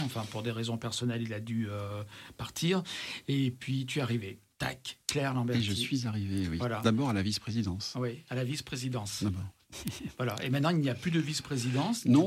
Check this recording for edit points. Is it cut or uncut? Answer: uncut